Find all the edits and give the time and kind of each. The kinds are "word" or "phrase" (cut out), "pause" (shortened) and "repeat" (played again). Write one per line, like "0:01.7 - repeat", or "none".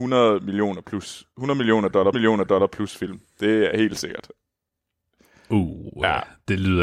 0:02.1 - repeat